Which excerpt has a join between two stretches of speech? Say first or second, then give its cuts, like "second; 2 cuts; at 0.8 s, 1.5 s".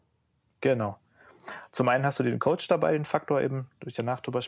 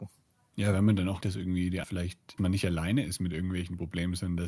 second; 3 cuts; at 1.2 s, 1.8 s, 2.4 s